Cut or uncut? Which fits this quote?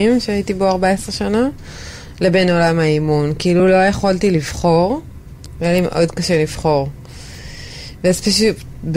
uncut